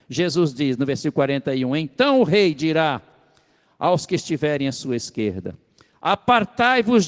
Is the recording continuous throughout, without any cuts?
yes; 0 cuts

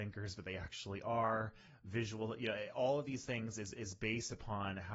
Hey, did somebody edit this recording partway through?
no; 0 cuts

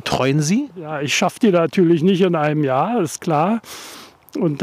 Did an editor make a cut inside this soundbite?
no; 0 cuts

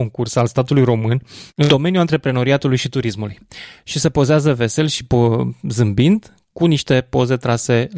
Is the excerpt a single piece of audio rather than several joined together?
no; 1 cut; at 1.5 s

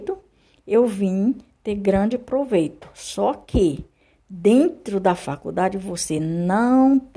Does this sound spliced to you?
no; 0 cuts

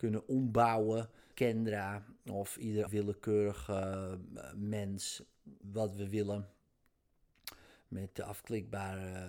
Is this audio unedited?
no; 3 cuts; at 1.3 s, 2.9 s, 5.6 s

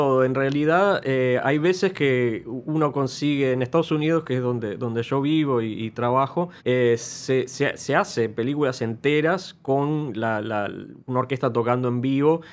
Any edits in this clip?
yes; 1 cut; at 6.6 s

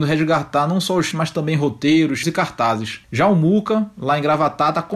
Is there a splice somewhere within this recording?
yes; 3 cuts; at 1.1 s, 2.2 s, 3.0 s

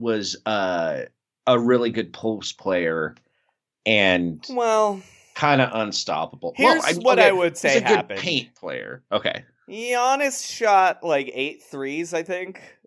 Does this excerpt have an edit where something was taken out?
no; 0 cuts

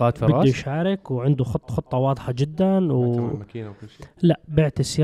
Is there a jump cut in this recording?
yes; 1 cut; at 1.7 s

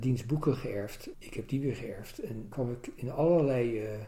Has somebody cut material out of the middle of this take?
yes; 2 cuts; at 1.1 s, 2.5 s

